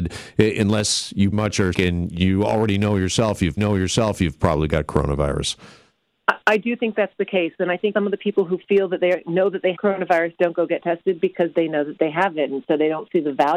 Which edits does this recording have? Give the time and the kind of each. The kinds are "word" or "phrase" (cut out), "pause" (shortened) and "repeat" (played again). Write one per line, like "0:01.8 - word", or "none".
0:01.3 - word
0:01.7 - word
0:03.6 - repeat
0:07.9 - word
0:09.7 - word